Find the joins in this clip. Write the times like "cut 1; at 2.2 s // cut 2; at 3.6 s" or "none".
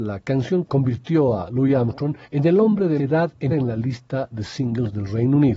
cut 1; at 2.2 s // cut 2; at 3.0 s // cut 3; at 3.5 s